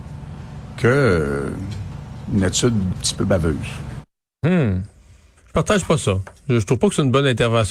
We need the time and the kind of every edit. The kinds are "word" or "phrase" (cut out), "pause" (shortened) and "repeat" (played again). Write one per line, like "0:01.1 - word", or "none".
0:02.9 - word